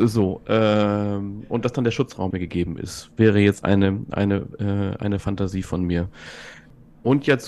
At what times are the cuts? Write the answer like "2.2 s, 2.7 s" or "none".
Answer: 2.3 s